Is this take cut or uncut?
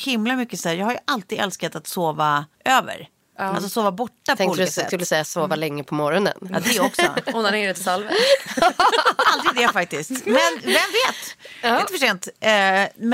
cut